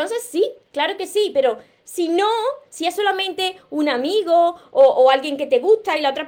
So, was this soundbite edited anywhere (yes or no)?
no